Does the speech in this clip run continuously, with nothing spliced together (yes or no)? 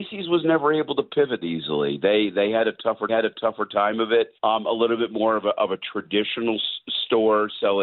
no